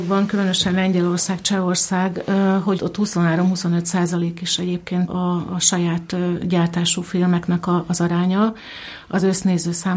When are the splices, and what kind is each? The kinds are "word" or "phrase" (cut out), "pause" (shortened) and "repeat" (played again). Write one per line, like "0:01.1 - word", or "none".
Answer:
0:02.8 - word
0:05.1 - word